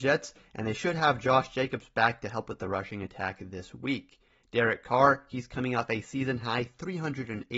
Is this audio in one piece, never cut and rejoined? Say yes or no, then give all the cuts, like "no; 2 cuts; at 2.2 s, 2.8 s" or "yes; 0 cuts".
yes; 0 cuts